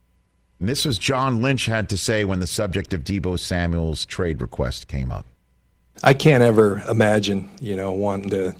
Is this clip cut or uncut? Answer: uncut